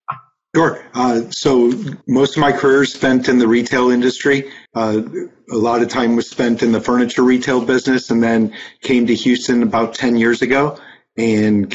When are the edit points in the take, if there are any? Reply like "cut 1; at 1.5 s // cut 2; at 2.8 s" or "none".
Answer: cut 1; at 2.0 s // cut 2; at 4.7 s